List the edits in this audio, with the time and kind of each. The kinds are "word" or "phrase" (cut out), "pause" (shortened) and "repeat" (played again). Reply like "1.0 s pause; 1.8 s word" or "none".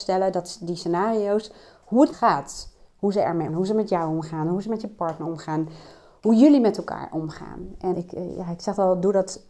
2.1 s phrase; 3.5 s word; 7.9 s word